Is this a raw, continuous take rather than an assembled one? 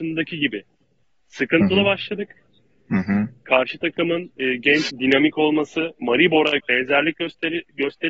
no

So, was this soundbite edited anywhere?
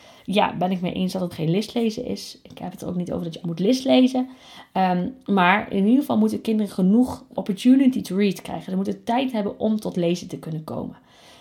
yes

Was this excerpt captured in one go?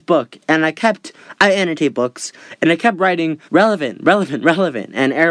no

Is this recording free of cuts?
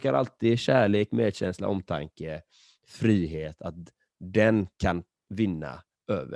yes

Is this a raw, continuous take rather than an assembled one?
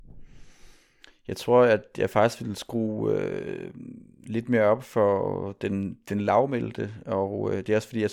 yes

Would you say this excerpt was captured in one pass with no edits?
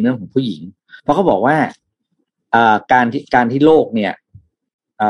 no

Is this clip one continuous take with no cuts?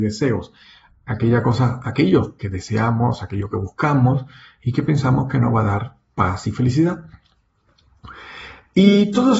yes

